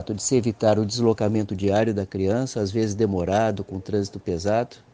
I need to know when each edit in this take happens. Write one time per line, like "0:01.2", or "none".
none